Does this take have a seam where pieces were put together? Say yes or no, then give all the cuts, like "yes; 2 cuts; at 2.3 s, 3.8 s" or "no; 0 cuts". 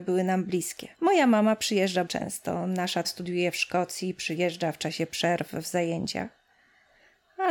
yes; 3 cuts; at 0.9 s, 2.1 s, 3.0 s